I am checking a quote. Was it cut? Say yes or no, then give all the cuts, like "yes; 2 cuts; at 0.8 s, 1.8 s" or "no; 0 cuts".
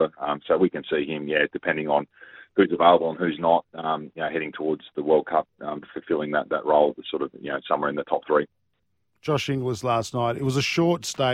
no; 0 cuts